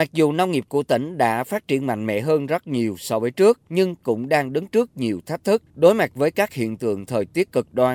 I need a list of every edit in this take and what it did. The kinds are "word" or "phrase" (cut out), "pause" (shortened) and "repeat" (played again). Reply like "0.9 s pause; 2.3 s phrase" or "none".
3.6 s pause; 5.7 s pause